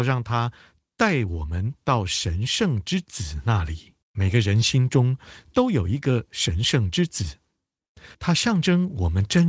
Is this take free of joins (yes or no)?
no